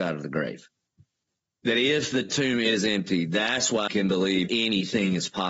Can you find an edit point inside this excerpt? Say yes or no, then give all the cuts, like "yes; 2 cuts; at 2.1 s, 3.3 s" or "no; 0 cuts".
yes; 2 cuts; at 3.9 s, 4.5 s